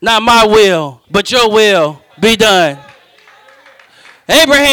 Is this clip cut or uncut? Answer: cut